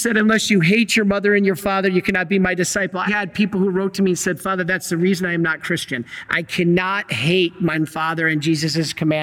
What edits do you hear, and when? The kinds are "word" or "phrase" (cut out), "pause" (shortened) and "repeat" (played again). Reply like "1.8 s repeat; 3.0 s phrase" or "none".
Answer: 3.1 s word; 7.7 s word